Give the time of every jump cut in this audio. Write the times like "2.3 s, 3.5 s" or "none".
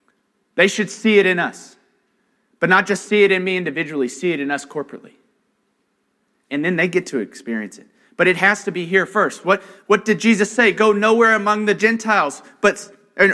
none